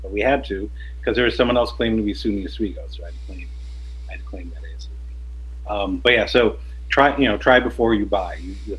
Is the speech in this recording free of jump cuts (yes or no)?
yes